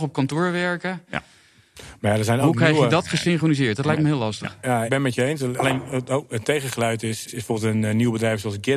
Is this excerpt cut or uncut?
cut